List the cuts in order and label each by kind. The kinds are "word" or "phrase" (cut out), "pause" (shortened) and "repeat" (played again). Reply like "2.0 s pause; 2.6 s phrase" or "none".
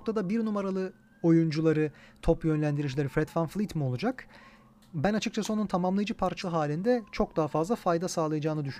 1.1 s pause; 6.4 s word